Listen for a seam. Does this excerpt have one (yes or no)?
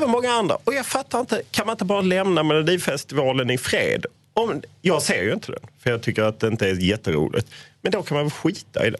no